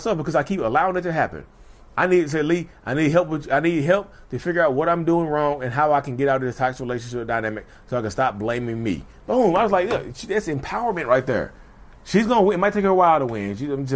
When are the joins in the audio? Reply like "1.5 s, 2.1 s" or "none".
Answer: none